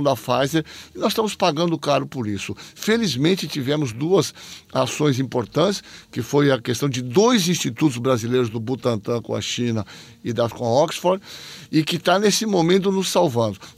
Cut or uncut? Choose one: cut